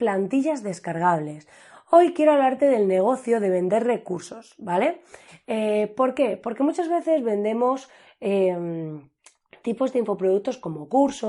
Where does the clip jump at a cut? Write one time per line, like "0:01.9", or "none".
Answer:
none